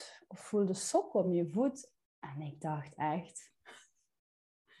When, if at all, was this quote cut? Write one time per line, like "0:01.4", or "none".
none